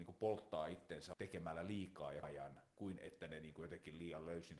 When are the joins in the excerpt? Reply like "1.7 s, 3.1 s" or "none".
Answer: 1.1 s, 2.2 s, 2.7 s